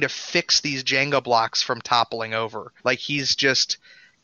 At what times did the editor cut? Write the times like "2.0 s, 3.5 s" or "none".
2.8 s